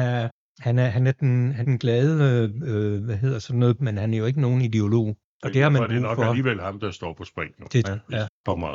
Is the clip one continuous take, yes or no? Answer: no